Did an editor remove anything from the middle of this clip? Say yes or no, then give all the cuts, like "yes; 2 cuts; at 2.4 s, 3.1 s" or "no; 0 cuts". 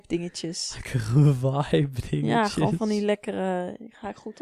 no; 0 cuts